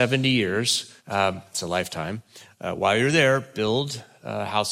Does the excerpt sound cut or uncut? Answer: cut